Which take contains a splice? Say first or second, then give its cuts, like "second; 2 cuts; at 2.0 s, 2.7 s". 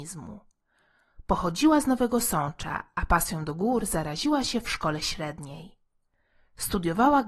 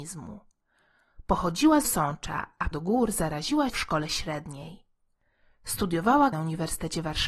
second; 4 cuts; at 1.8 s, 2.7 s, 3.7 s, 6.3 s